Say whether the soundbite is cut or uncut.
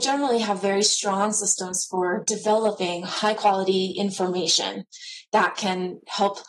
uncut